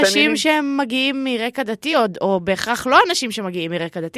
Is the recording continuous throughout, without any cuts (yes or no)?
yes